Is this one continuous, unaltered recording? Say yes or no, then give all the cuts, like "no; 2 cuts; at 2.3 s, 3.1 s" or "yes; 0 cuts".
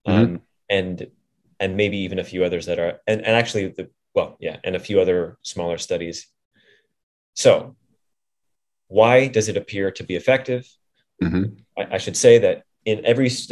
yes; 0 cuts